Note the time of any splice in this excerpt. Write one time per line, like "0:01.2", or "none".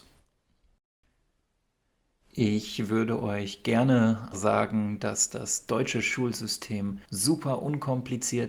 0:04.3
0:07.0